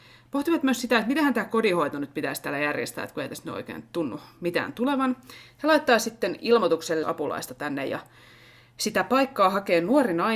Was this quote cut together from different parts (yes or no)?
yes